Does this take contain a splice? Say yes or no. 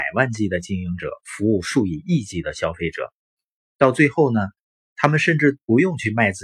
no